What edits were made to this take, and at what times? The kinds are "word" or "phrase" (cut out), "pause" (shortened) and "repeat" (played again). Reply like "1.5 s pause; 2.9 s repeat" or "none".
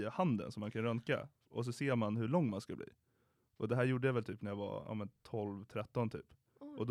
none